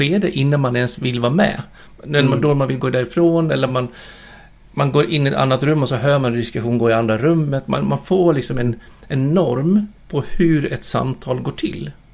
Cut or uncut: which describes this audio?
uncut